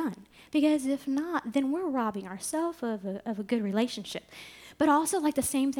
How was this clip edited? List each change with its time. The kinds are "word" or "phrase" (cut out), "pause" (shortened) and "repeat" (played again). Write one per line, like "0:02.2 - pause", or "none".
none